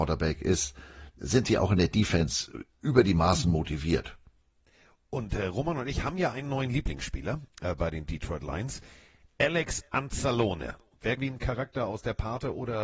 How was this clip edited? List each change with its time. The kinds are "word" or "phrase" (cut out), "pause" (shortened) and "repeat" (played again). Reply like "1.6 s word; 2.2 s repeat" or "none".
11.2 s phrase